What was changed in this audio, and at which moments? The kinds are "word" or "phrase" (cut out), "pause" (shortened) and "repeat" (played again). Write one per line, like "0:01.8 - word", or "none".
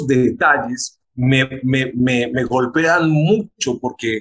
0:01.0 - pause